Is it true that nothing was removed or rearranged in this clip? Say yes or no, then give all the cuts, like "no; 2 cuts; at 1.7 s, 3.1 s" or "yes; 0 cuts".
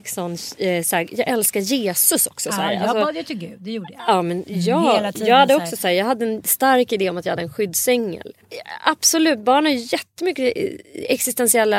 yes; 0 cuts